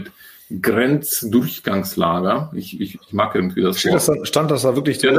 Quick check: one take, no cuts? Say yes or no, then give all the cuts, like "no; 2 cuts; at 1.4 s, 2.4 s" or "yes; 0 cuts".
yes; 0 cuts